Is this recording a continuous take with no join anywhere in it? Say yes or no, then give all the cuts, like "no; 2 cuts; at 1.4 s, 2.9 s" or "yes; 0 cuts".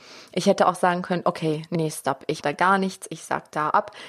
no; 2 cuts; at 1.7 s, 2.4 s